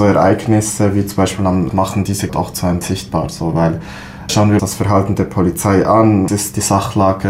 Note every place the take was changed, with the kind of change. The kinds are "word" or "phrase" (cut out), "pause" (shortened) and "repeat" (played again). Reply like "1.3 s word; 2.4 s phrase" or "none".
1.7 s word; 2.3 s word; 2.8 s word; 4.3 s word; 4.6 s word; 6.3 s word